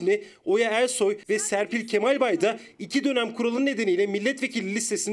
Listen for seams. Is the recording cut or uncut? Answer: uncut